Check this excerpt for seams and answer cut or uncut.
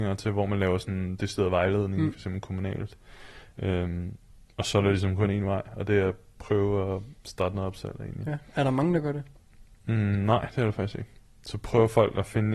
uncut